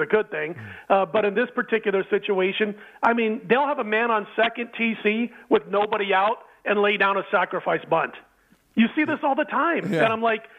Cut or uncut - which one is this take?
uncut